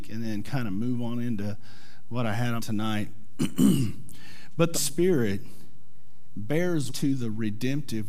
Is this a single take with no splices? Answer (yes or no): no